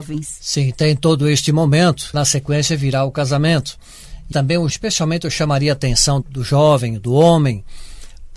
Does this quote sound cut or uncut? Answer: cut